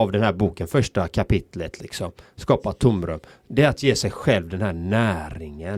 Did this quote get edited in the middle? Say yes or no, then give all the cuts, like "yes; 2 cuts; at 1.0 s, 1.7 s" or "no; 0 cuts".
no; 0 cuts